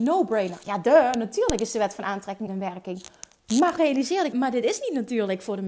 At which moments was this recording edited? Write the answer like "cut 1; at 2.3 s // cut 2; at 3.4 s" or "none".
cut 1; at 2.5 s // cut 2; at 3.8 s // cut 3; at 4.3 s